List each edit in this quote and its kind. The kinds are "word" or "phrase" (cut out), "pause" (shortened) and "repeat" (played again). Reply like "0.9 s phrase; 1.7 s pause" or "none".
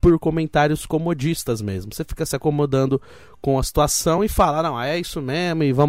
none